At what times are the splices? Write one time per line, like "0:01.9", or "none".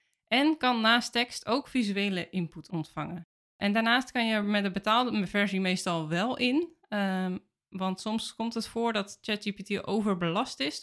none